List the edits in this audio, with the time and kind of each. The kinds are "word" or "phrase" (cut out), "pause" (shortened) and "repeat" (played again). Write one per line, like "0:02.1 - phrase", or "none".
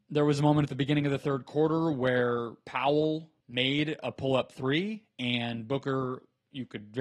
0:03.4 - pause